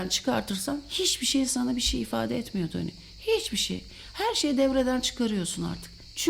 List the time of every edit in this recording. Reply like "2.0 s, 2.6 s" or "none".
none